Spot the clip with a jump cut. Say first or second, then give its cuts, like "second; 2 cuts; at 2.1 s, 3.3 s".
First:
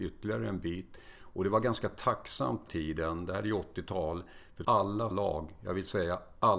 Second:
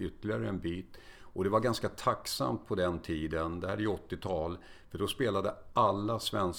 first; 3 cuts; at 2.7 s, 4.6 s, 5.1 s